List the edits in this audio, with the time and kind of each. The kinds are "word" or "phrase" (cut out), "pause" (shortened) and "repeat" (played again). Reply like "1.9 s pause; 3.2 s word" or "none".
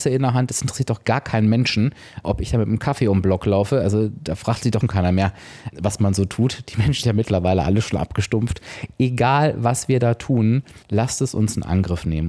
2.2 s word; 4.8 s phrase; 5.7 s word; 7.0 s word; 10.8 s pause

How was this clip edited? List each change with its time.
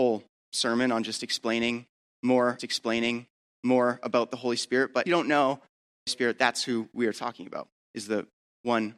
2.6 s repeat; 5.1 s phrase; 6.1 s phrase

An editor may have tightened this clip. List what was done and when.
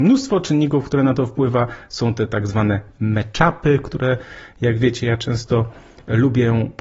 none

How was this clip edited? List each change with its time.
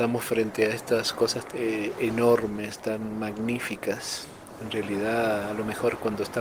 1.5 s word

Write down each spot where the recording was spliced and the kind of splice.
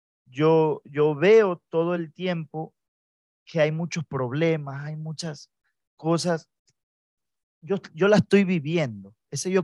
none

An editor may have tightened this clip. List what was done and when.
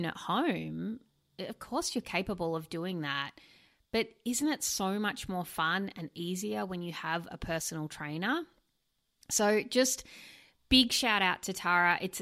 none

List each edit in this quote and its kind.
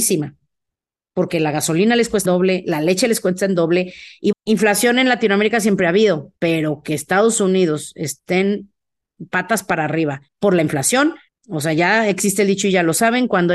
2.2 s word; 4.3 s word; 6.4 s pause; 10.3 s pause; 11.3 s pause

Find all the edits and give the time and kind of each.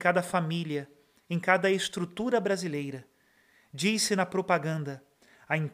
none

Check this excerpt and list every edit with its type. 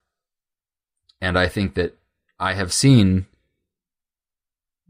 none

